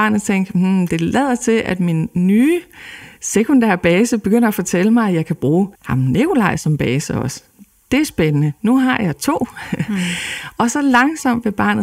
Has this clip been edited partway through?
yes; 1 cut; at 5.7 s

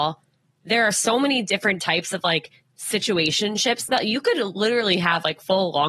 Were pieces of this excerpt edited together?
yes; 1 cut; at 3.9 s

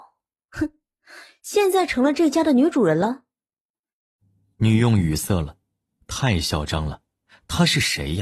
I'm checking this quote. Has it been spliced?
no; 0 cuts

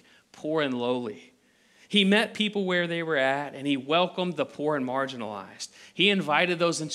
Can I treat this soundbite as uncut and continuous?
yes; 0 cuts

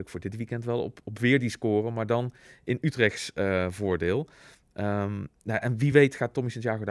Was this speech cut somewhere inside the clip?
no; 0 cuts

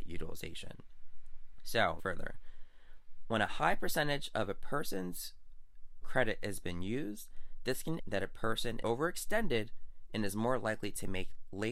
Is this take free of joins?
no; 4 cuts; at 2.0 s, 6.0 s, 8.0 s, 8.8 s

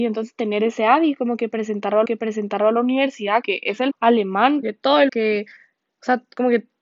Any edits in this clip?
yes; 5 cuts; at 2.1 s, 3.4 s, 3.9 s, 4.6 s, 5.1 s

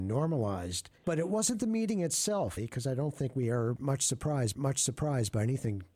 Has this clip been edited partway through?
yes; 3 cuts; at 1.0 s, 2.6 s, 4.5 s

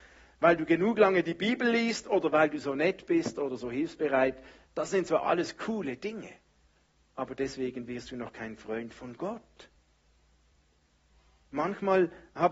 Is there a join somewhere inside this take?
no; 0 cuts

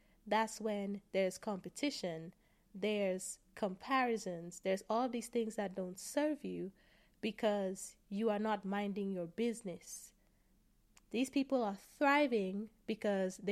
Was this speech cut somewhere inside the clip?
no; 0 cuts

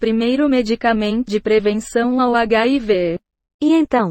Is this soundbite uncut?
no; 1 cut; at 1.3 s

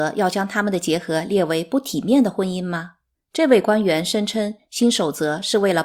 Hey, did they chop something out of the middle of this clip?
yes; 1 cut; at 3.1 s

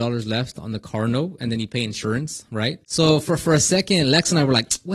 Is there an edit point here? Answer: yes; 1 cut; at 2.8 s

